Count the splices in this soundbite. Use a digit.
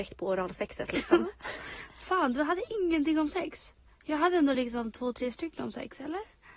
0